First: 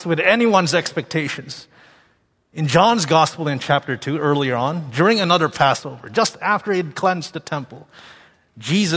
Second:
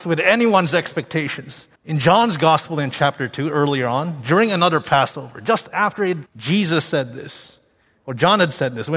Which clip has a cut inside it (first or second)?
second